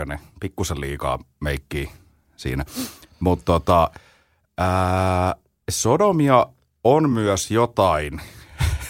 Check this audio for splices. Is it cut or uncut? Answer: uncut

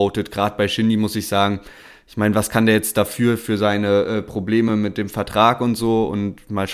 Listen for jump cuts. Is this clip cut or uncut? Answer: uncut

